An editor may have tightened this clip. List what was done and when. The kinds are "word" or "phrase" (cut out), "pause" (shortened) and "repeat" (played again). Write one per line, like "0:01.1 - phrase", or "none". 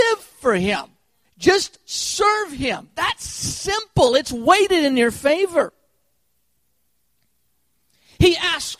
0:01.2 - pause